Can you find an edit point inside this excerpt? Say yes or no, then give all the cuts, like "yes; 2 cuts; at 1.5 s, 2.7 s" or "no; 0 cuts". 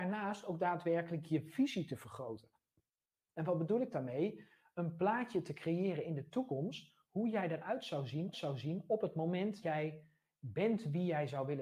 yes; 2 cuts; at 8.3 s, 9.6 s